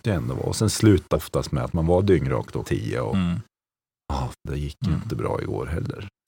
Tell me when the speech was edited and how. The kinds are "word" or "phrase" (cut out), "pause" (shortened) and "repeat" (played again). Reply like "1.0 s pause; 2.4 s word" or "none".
1.1 s word; 2.6 s word; 4.3 s word